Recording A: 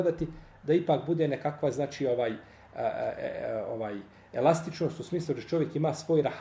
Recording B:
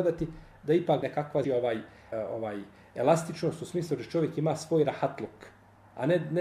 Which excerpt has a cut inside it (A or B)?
B